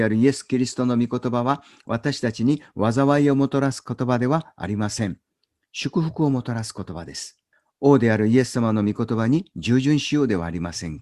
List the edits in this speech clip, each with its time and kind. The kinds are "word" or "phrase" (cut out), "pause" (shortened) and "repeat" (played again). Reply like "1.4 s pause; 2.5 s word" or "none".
7.5 s pause